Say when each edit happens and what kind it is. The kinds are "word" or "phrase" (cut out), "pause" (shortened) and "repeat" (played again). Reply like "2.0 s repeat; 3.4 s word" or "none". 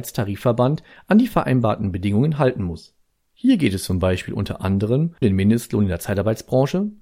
5.2 s word